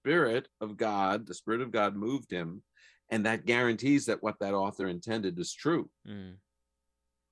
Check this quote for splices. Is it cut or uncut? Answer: uncut